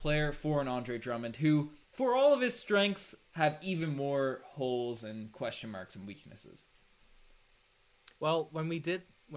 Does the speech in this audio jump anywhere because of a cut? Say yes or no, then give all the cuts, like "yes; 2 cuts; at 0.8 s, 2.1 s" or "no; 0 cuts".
yes; 2 cuts; at 1.8 s, 8.2 s